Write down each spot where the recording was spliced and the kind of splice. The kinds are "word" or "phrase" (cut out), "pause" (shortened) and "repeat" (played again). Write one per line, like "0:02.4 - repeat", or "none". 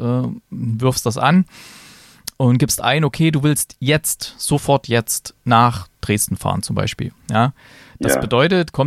none